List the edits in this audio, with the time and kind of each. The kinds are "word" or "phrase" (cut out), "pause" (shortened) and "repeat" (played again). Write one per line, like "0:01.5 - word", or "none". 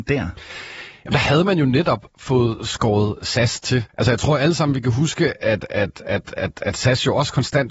0:03.9 - pause

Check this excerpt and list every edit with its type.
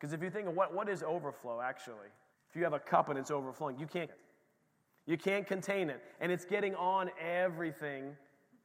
0:02.3 - pause
0:04.1 - word

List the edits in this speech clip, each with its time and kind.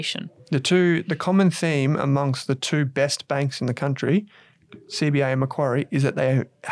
none

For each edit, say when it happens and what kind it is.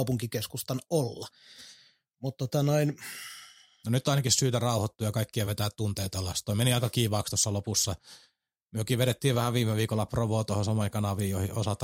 none

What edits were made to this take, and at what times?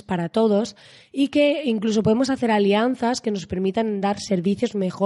none

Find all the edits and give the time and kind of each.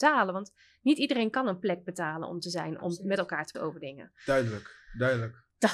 0:03.5 - word

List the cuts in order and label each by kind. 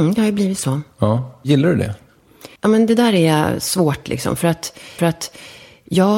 0:02.6 - pause
0:05.0 - repeat

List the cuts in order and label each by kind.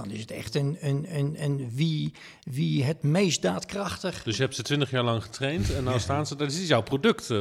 none

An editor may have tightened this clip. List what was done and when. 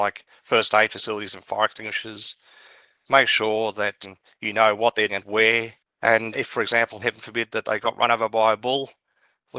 0:04.0 - word
0:05.1 - word
0:06.3 - word

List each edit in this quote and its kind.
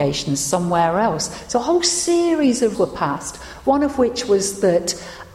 0:02.7 - word

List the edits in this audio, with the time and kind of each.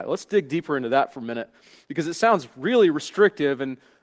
none

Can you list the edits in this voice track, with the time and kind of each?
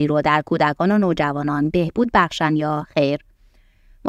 none

